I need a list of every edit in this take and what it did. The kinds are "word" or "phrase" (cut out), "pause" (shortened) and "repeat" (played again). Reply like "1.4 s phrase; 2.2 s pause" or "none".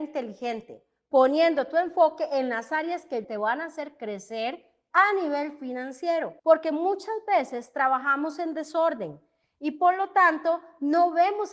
3.2 s word; 6.4 s pause